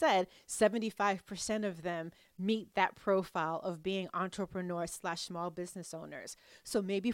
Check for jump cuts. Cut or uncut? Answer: uncut